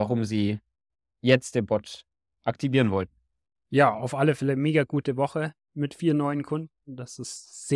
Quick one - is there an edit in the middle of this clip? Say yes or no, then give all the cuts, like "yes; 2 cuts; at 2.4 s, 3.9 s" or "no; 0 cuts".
no; 0 cuts